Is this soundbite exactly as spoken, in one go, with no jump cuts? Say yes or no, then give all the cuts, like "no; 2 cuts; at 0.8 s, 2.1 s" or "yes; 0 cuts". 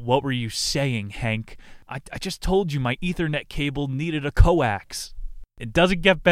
yes; 0 cuts